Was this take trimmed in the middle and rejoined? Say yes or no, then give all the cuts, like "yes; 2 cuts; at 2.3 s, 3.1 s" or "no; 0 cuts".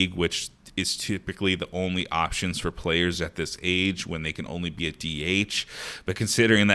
no; 0 cuts